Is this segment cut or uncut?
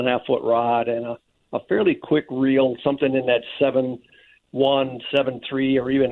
uncut